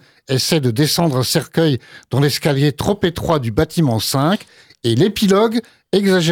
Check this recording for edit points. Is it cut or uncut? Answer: uncut